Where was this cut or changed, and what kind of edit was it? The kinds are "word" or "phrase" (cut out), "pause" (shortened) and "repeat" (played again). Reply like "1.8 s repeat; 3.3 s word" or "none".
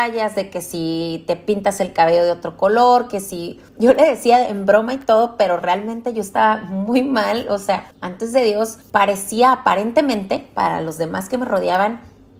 3.7 s pause; 7.9 s pause; 8.8 s pause